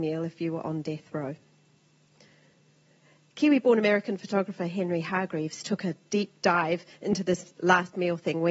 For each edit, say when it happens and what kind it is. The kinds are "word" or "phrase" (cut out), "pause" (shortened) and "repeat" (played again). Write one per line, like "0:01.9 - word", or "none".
none